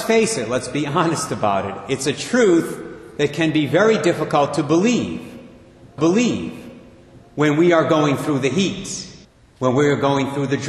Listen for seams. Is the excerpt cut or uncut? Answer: cut